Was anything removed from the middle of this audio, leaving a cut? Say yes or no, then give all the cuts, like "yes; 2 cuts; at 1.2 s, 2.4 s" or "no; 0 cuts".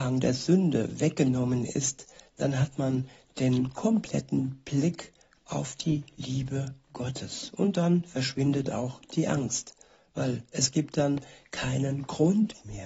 no; 0 cuts